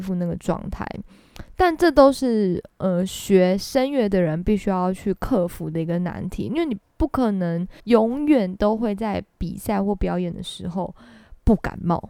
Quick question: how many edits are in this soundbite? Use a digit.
1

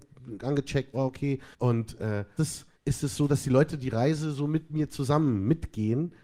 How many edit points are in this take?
4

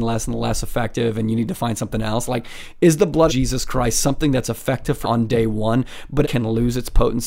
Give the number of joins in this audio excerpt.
3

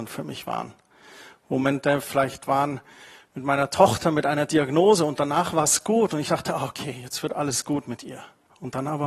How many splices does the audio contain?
0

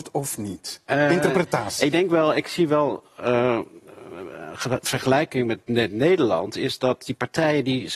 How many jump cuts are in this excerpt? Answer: 0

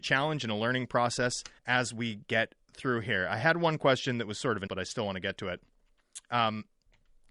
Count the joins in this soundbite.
2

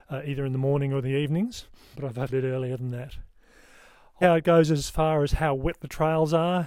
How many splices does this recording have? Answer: 3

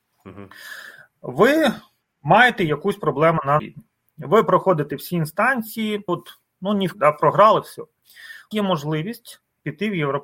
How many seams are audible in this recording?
4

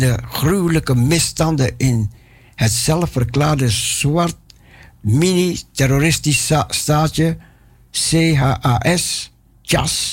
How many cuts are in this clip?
0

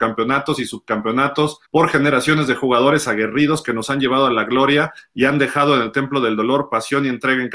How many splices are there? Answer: 1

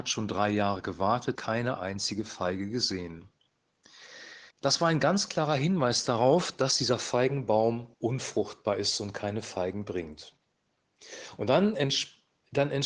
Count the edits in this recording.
3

